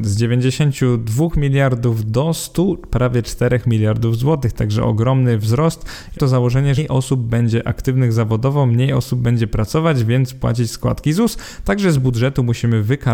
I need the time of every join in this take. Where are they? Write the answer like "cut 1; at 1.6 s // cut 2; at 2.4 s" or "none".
cut 1; at 6.2 s // cut 2; at 6.8 s